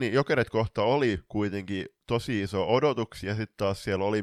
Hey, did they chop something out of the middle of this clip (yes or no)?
no